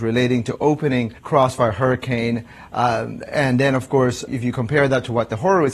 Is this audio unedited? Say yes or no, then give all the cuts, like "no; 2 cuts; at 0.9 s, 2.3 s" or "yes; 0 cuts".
no; 2 cuts; at 1.2 s, 4.3 s